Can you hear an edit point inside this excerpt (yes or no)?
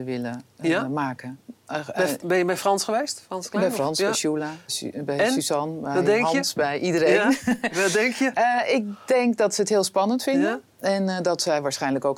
yes